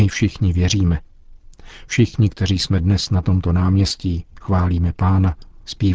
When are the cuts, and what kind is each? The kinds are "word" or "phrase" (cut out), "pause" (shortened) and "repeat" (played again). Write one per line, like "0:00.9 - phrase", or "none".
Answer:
none